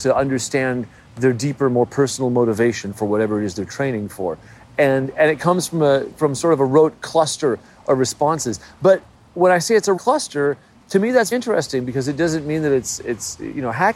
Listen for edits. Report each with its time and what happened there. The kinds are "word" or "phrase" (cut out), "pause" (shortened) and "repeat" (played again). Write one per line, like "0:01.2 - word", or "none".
0:10.0 - word
0:11.3 - word